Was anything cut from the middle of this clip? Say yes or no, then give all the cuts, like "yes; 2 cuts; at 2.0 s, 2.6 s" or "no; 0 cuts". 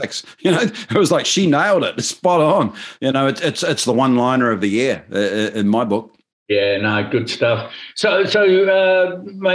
no; 0 cuts